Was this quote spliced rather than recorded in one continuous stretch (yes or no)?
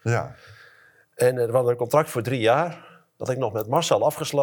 no